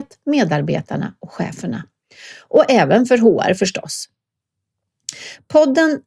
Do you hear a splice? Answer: no; 0 cuts

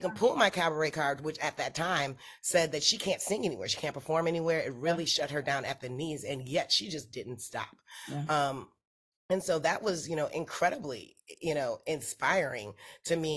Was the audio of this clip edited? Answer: no; 0 cuts

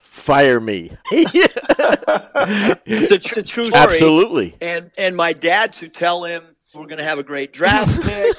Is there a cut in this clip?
yes; 6 cuts; at 1.0 s, 3.3 s, 3.7 s, 4.9 s, 5.7 s, 6.7 s

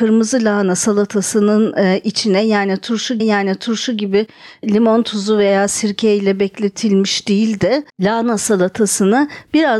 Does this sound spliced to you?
yes; 2 cuts; at 3.2 s, 7.9 s

